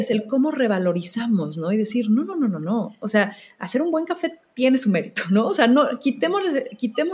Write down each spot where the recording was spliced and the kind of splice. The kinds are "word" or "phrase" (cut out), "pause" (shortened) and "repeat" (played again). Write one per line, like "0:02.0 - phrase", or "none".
none